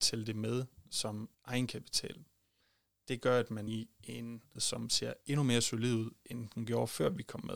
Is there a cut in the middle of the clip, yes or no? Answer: yes